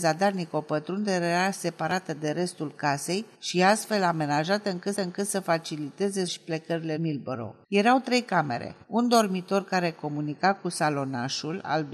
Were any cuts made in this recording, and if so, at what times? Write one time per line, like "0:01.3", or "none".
0:03.3
0:04.9
0:06.3
0:07.0
0:07.6
0:08.8